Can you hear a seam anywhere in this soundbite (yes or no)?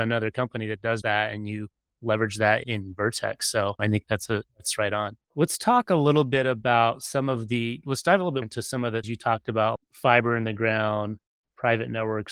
yes